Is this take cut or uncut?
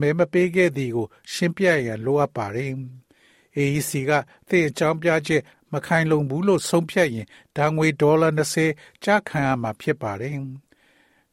uncut